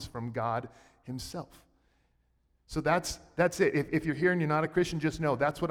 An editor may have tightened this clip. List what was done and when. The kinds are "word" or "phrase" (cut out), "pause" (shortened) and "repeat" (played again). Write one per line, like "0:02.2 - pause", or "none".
none